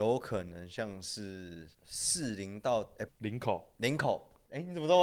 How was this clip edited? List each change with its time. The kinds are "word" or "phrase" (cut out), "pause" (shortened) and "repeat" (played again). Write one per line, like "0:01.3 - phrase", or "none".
0:01.7 - pause
0:03.1 - phrase